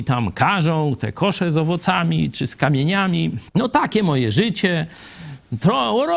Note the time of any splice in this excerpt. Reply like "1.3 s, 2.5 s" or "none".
3.5 s